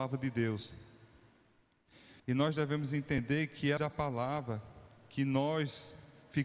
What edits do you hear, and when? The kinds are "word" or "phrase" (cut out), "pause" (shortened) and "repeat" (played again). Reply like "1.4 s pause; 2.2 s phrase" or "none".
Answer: 2.2 s pause; 3.8 s word

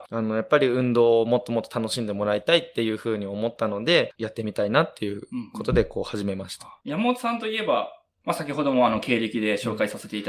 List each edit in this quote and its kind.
none

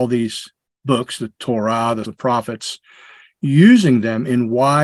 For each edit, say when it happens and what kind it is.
2.0 s word

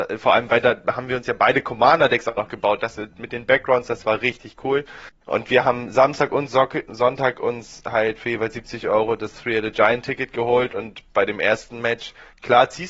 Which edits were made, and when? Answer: 5.2 s pause

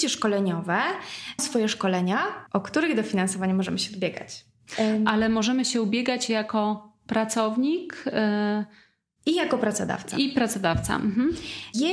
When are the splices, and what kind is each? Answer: 1.4 s word

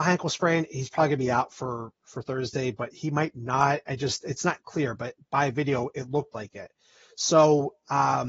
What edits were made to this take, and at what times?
none

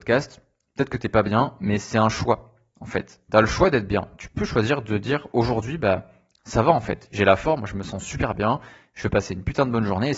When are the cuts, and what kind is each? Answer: none

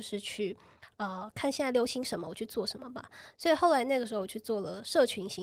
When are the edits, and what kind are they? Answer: none

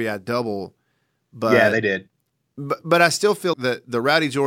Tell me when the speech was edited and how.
3.5 s word

